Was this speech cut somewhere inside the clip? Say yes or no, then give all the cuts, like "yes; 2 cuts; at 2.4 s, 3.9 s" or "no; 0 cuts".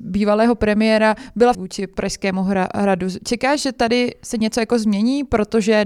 yes; 1 cut; at 1.5 s